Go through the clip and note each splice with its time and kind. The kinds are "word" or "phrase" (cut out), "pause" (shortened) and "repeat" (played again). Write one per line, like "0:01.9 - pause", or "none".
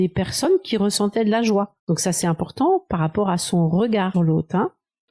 0:01.8 - pause
0:04.1 - word